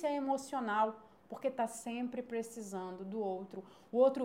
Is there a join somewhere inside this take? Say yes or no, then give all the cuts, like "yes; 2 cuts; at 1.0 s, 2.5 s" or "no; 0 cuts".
no; 0 cuts